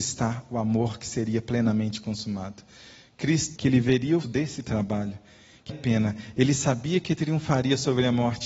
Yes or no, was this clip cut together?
yes